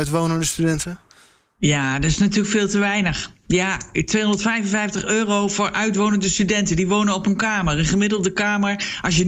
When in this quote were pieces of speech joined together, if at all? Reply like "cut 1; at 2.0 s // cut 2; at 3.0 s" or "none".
none